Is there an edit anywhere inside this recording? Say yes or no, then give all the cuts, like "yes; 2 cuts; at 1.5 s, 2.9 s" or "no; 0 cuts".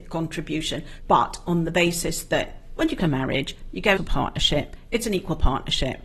yes; 3 cuts; at 1.0 s, 3.0 s, 4.0 s